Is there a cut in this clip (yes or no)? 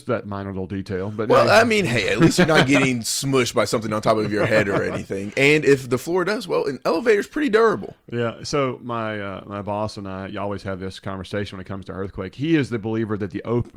no